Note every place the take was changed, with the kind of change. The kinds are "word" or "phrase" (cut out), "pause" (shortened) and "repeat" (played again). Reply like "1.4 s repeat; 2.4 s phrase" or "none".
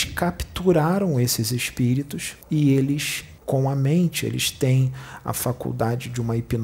2.4 s pause; 3.4 s pause